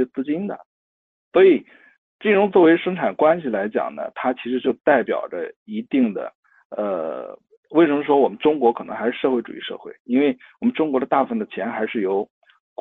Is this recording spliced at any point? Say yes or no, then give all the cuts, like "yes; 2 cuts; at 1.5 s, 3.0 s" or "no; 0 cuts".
no; 0 cuts